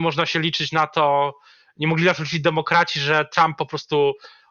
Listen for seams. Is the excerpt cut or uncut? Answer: uncut